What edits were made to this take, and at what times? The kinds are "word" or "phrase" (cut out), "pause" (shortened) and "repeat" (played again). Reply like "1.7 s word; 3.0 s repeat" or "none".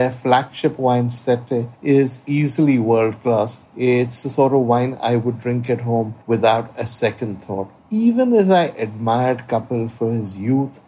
1.7 s pause; 3.7 s pause; 6.2 s pause; 7.8 s pause